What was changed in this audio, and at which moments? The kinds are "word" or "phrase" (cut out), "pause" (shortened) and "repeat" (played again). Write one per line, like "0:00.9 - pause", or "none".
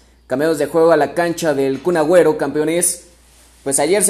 none